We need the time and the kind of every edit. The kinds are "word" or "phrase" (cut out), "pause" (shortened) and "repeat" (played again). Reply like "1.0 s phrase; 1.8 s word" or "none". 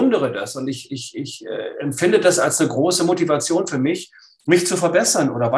none